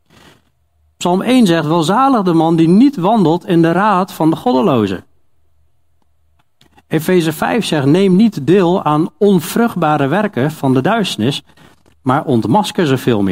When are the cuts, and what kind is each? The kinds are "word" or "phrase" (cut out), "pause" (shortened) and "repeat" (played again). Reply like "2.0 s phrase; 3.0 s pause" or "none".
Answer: none